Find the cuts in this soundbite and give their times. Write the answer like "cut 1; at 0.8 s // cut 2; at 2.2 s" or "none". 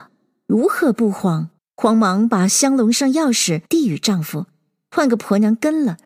cut 1; at 1.6 s // cut 2; at 3.7 s

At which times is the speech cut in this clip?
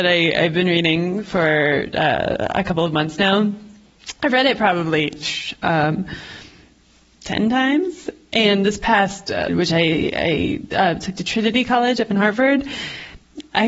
cut 1; at 9.5 s

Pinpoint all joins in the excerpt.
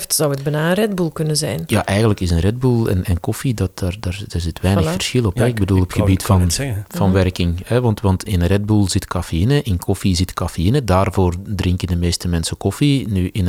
cut 1; at 8.3 s

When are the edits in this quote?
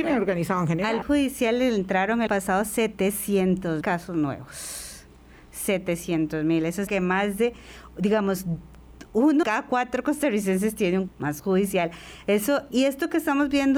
cut 1; at 1.0 s // cut 2; at 2.3 s // cut 3; at 3.8 s // cut 4; at 6.9 s // cut 5; at 9.4 s // cut 6; at 11.1 s // cut 7; at 11.4 s // cut 8; at 12.7 s

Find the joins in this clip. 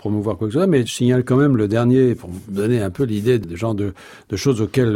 cut 1; at 3.4 s

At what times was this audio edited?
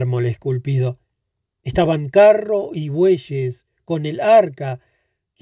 none

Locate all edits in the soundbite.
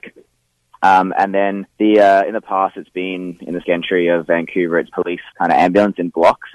cut 1; at 1.7 s // cut 2; at 3.6 s // cut 3; at 4.9 s // cut 4; at 5.3 s

